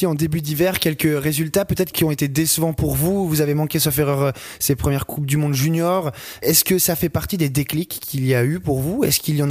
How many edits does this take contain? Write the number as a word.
zero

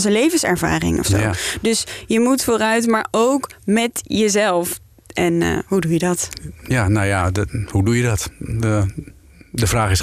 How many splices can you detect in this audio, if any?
one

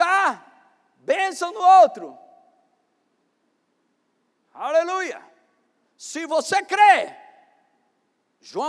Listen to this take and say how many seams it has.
zero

